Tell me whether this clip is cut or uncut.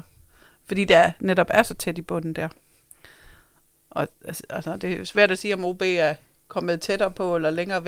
uncut